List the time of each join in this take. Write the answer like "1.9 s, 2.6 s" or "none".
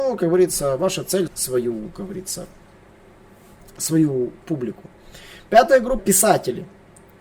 1.3 s, 6.0 s